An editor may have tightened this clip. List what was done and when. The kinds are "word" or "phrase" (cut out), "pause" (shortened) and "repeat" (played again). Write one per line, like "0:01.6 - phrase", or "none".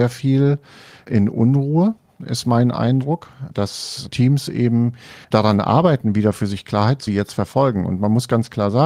0:05.2 - pause
0:07.1 - phrase